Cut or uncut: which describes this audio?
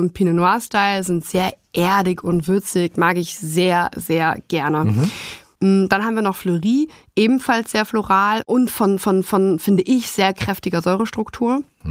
uncut